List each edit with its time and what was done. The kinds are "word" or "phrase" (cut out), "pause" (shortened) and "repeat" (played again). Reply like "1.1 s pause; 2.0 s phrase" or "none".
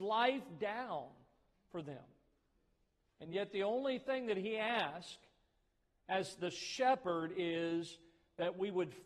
none